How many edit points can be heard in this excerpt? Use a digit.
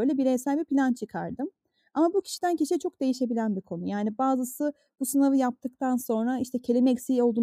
0